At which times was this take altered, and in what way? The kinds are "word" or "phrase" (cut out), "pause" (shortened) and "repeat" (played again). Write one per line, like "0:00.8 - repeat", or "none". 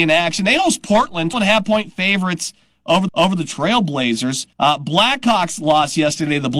0:01.3 - word
0:03.1 - repeat
0:04.5 - pause